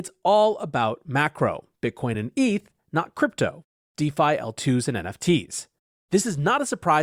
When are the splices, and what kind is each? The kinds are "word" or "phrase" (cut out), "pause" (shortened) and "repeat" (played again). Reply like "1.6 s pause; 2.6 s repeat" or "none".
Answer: none